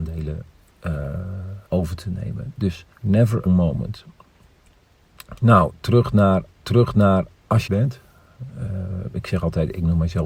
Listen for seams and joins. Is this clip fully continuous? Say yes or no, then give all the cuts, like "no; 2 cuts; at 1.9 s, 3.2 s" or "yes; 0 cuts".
no; 5 cuts; at 1.7 s, 2.9 s, 3.5 s, 6.6 s, 7.7 s